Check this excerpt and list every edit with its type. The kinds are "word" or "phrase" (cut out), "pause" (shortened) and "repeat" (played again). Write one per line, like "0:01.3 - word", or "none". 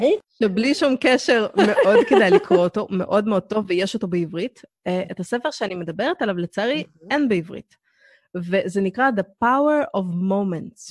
none